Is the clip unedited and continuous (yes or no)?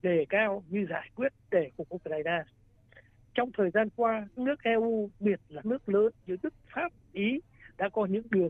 no